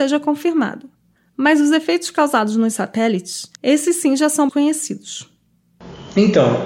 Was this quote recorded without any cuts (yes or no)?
no